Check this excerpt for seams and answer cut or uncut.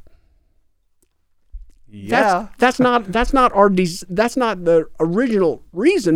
uncut